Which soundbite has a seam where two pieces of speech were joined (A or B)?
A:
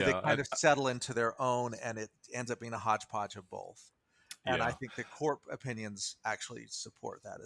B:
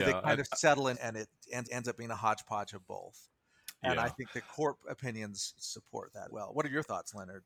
B